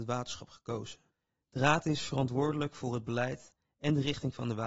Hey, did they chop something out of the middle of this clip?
yes; 1 cut; at 1.1 s

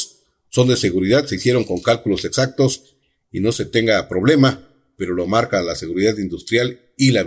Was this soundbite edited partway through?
no; 0 cuts

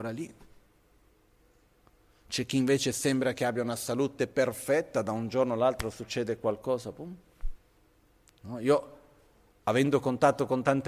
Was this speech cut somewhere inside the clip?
no; 0 cuts

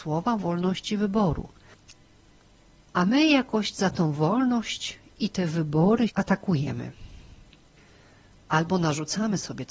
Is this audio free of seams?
no; 1 cut; at 6.1 s

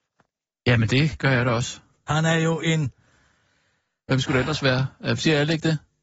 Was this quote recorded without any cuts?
yes; 0 cuts

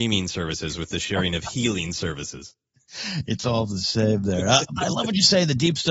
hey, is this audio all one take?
yes; 0 cuts

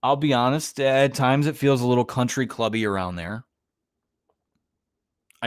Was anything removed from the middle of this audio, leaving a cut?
no; 0 cuts

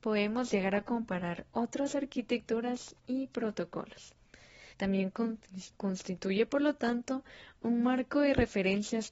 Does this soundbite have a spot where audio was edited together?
yes; 1 cut; at 4.7 s

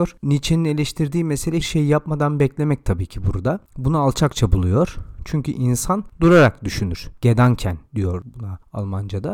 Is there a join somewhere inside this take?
yes; 1 cut; at 1.6 s

